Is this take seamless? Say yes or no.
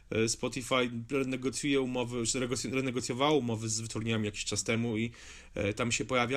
yes